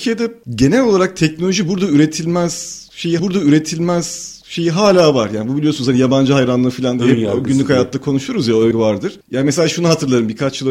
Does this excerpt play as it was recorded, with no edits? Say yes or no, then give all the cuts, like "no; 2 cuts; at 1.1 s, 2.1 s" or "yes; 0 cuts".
no; 2 cuts; at 3.2 s, 8.7 s